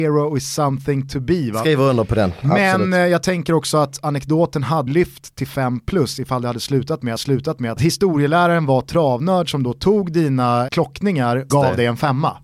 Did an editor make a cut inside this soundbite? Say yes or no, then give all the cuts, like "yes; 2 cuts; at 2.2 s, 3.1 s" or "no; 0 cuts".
yes; 4 cuts; at 4.9 s, 7.2 s, 10.7 s, 11.5 s